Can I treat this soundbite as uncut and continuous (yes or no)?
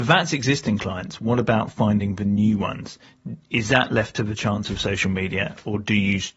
yes